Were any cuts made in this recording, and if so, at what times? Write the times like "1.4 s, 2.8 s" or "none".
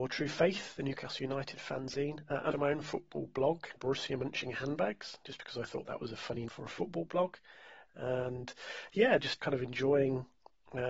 2.5 s, 3.8 s, 6.5 s, 9.4 s